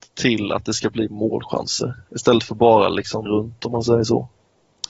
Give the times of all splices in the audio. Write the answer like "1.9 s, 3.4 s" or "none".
3.3 s